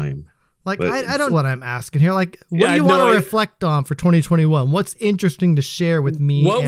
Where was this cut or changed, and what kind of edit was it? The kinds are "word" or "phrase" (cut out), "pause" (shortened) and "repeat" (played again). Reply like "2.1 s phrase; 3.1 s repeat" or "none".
1.3 s word